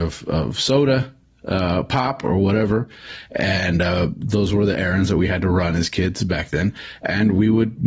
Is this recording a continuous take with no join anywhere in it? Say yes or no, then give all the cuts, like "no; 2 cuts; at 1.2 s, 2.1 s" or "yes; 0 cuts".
yes; 0 cuts